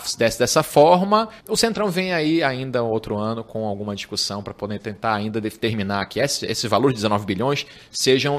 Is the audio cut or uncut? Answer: cut